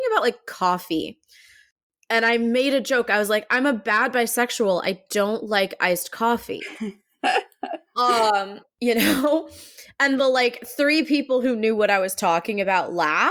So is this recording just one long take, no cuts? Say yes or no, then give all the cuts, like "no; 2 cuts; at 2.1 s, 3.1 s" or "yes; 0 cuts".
yes; 0 cuts